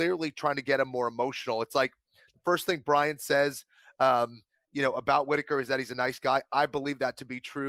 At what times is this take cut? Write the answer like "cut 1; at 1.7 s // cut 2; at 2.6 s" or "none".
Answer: none